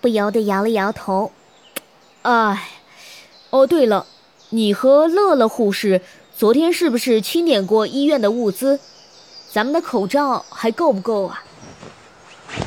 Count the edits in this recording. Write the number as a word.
zero